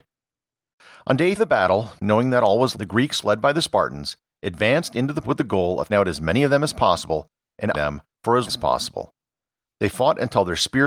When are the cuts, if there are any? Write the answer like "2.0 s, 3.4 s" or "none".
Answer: 1.4 s, 2.7 s, 5.2 s, 5.9 s, 7.7 s, 8.5 s